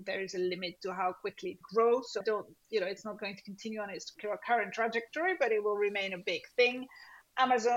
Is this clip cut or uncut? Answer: cut